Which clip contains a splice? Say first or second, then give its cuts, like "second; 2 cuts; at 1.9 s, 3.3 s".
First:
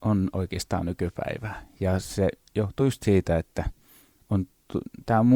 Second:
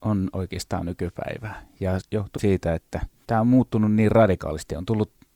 second; 3 cuts; at 2.0 s, 2.4 s, 3.2 s